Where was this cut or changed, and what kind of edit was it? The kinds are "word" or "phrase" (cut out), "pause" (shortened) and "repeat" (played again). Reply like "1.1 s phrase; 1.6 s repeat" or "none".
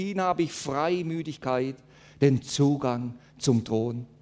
none